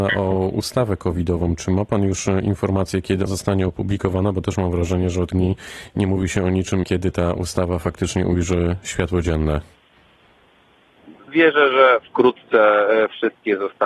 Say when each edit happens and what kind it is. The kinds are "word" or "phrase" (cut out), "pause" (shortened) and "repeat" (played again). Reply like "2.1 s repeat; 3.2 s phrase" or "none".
3.3 s word; 5.3 s word; 6.8 s phrase; 11.2 s pause

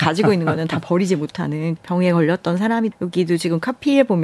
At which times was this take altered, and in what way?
1.8 s word; 2.9 s word

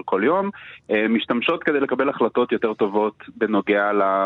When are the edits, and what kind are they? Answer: none

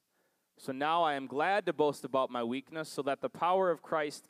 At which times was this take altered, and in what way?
none

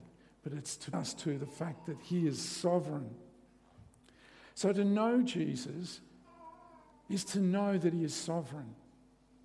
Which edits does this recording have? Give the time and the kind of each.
0.9 s word; 6.9 s pause

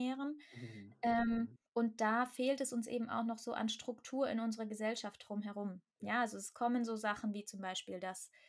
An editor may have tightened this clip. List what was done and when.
1.7 s pause

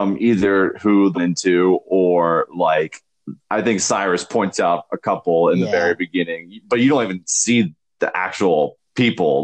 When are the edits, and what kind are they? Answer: 1.1 s phrase

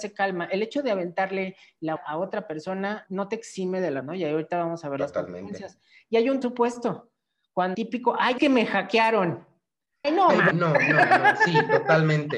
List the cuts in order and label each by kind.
2.0 s word; 3.1 s word; 4.0 s word; 6.4 s word; 7.7 s word; 8.4 s word; 10.0 s word; 10.5 s word

